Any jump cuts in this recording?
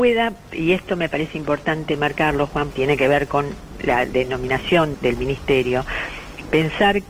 yes; 2 cuts; at 2.7 s, 4.9 s

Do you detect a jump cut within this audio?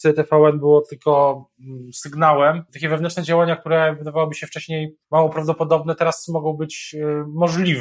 yes; 2 cuts; at 2.7 s, 5.0 s

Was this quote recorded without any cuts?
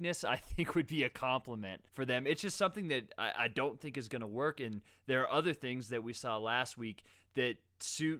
no; 1 cut; at 1.9 s

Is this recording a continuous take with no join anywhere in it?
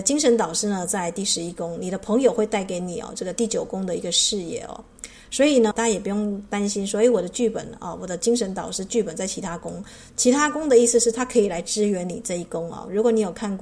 no; 1 cut; at 5.7 s

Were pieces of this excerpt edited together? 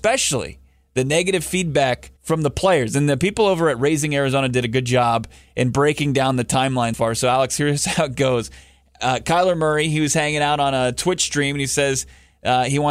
yes; 2 cuts; at 2.2 s, 6.9 s

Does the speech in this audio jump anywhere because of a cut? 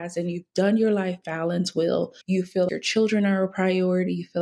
yes; 2 cuts; at 2.2 s, 2.7 s

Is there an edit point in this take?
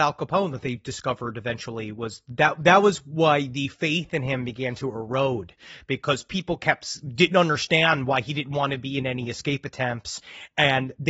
no; 0 cuts

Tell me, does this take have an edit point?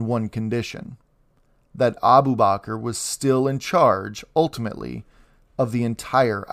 no; 0 cuts

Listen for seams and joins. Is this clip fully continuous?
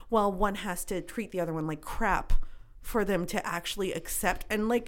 yes; 0 cuts

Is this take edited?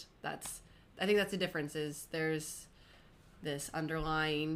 no; 0 cuts

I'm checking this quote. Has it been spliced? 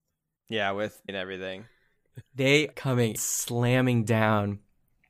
yes; 3 cuts; at 1.1 s, 2.7 s, 3.2 s

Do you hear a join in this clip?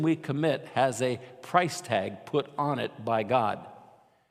no; 0 cuts

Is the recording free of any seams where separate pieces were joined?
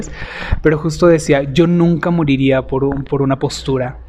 yes; 0 cuts

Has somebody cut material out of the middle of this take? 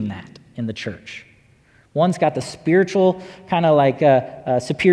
no; 0 cuts

